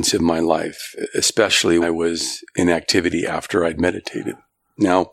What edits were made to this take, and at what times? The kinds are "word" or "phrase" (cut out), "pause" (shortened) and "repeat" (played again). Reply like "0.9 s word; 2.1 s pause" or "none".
1.8 s word

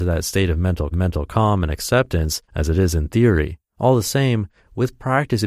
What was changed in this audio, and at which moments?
0.9 s repeat; 2.5 s pause; 3.7 s pause

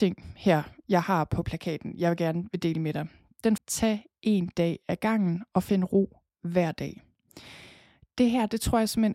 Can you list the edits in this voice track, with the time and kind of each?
3.6 s word

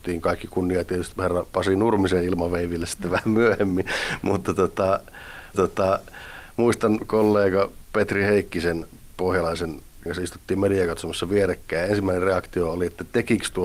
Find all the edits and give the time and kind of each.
1.1 s word; 5.5 s repeat; 10.1 s word

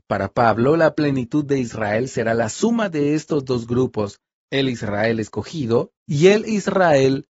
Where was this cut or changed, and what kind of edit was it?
6.0 s pause

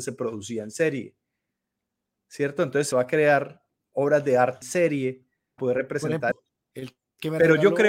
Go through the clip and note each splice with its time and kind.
2.9 s word; 3.9 s word; 4.6 s word; 5.6 s word; 6.3 s word

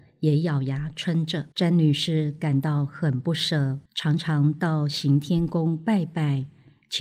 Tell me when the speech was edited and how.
1.5 s pause; 3.9 s pause

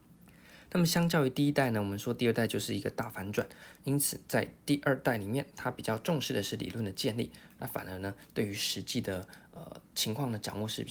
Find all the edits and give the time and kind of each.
3.8 s word

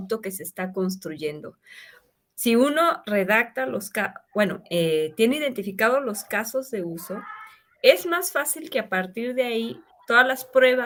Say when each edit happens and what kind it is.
none

